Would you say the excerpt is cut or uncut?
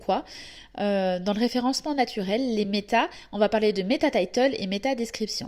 uncut